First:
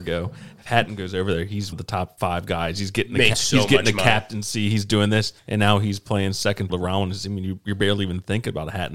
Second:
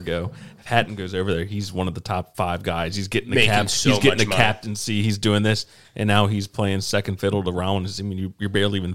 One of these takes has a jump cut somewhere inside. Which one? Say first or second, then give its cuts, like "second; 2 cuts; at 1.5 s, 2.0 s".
first; 4 cuts; at 1.7 s, 3.3 s, 5.4 s, 6.7 s